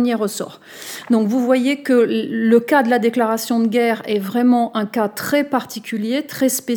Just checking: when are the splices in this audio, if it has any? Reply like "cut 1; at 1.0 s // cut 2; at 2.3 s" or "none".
none